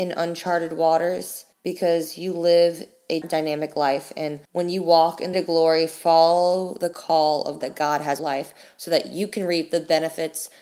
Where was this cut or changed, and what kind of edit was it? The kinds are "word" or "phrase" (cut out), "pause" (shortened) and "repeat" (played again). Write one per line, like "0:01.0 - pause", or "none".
0:01.5 - pause
0:03.2 - word
0:04.4 - pause
0:05.3 - phrase
0:07.6 - word
0:08.2 - phrase